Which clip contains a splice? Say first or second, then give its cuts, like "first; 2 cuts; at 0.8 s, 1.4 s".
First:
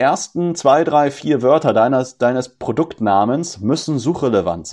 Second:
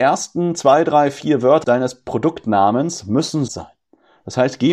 second; 2 cuts; at 1.6 s, 3.5 s